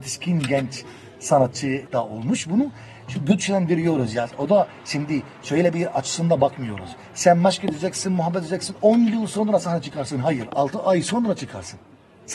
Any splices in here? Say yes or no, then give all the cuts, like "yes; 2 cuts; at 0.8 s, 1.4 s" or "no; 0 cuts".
no; 0 cuts